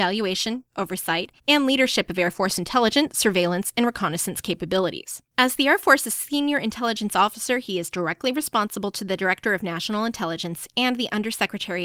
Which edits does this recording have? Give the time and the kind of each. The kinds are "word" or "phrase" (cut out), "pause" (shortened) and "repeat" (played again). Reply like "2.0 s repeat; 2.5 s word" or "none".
1.4 s pause; 5.3 s pause